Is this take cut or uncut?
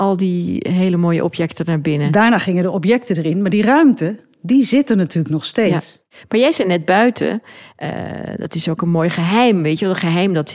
uncut